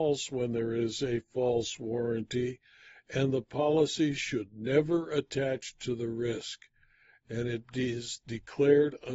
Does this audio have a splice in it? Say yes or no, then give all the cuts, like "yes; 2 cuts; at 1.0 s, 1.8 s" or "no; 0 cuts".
no; 0 cuts